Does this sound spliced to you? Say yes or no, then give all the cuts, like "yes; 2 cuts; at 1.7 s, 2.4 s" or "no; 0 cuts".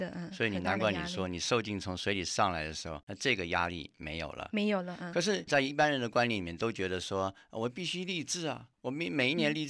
yes; 2 cuts; at 3.0 s, 8.7 s